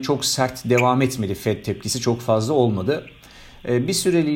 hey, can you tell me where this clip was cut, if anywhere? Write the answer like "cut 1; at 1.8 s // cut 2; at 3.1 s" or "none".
none